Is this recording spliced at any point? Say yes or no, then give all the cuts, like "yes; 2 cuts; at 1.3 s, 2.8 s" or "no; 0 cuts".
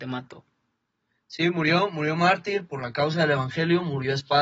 no; 0 cuts